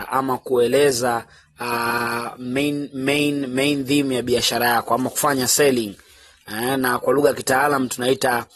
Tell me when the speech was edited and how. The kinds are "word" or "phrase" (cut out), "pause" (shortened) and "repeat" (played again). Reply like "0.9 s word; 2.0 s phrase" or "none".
none